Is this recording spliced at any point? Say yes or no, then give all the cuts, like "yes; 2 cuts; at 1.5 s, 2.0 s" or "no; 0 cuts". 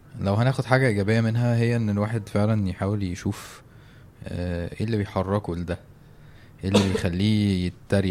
no; 0 cuts